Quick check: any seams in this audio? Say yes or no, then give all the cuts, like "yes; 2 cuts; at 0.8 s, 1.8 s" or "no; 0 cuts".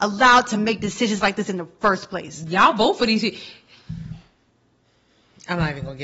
no; 0 cuts